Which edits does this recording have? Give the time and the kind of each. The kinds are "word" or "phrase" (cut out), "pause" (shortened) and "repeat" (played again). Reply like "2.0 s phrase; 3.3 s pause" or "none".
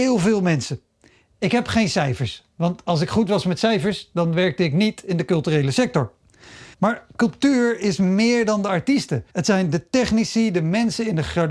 6.7 s pause; 9.3 s pause